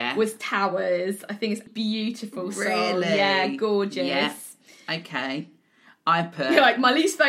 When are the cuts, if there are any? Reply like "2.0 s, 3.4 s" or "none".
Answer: 1.7 s